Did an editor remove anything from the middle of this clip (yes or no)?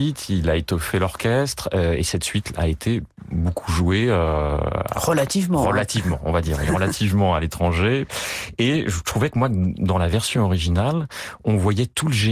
no